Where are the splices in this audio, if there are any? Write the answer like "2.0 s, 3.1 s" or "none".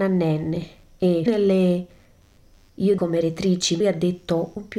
1.3 s, 3.0 s, 3.8 s

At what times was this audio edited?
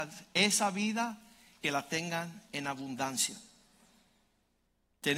1.6 s

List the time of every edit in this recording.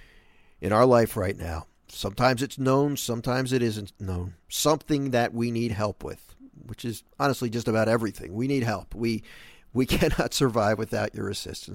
1.8 s, 4.4 s

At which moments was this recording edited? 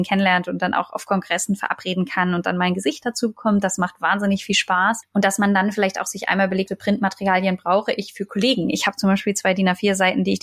6.7 s

